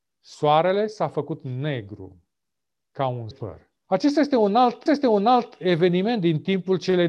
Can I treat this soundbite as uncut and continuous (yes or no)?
no